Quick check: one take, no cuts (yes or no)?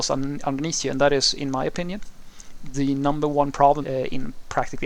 no